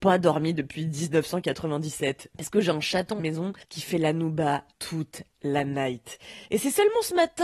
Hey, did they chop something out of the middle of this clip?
yes; 4 cuts; at 3.2 s, 3.6 s, 4.7 s, 6.5 s

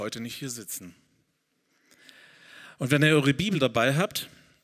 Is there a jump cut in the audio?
no; 0 cuts

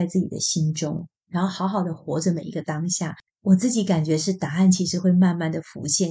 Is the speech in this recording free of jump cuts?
no; 2 cuts; at 1.2 s, 3.3 s

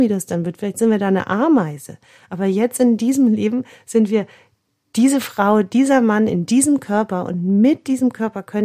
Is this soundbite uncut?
yes; 0 cuts

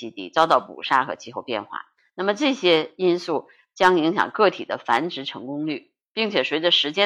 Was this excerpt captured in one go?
yes; 0 cuts

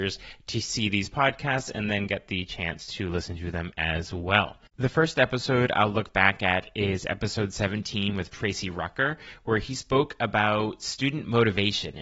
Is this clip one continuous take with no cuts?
yes; 0 cuts

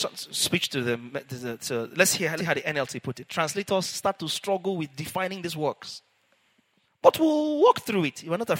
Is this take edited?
yes; 1 cut; at 2.4 s

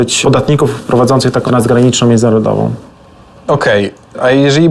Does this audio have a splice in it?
yes; 1 cut; at 1.5 s

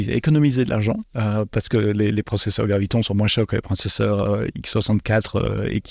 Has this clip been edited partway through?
no; 0 cuts

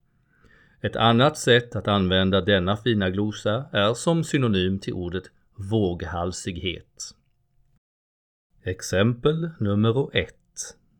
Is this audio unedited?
yes; 0 cuts

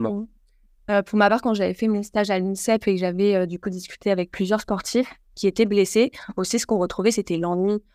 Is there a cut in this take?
no; 0 cuts

